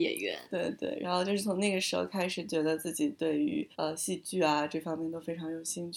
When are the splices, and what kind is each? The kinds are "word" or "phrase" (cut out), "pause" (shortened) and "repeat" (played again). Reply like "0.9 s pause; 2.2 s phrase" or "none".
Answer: 3.7 s pause

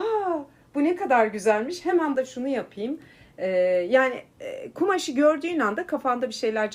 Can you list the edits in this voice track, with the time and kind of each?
2.1 s phrase

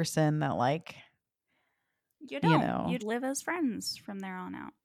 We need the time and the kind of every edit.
3.0 s word

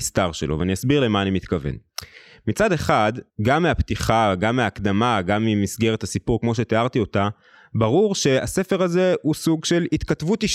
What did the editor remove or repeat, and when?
3.3 s pause

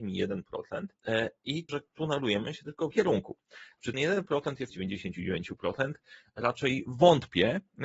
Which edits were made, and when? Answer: 1.0 s pause; 1.7 s word; 2.9 s word; 3.9 s word; 4.7 s phrase

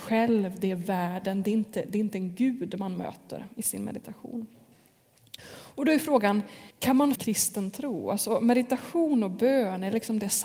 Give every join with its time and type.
5.4 s pause; 6.7 s pause; 7.2 s phrase

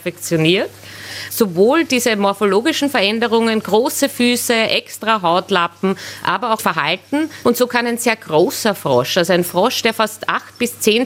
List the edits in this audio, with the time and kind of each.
6.6 s word

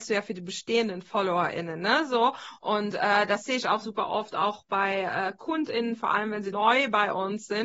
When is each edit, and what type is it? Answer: 3.8 s word; 6.5 s word

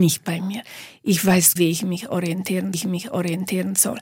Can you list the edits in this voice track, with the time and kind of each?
1.6 s word; 2.7 s repeat

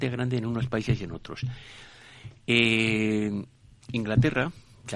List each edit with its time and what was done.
none

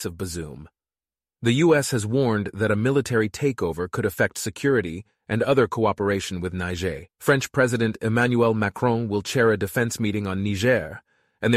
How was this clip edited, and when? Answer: 7.1 s pause

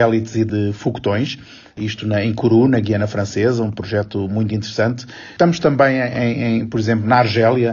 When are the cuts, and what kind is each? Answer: none

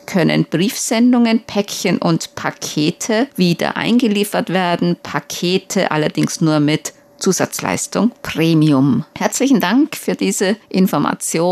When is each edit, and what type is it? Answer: none

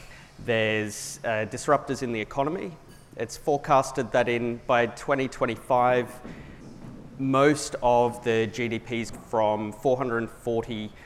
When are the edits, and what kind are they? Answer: 9.1 s phrase

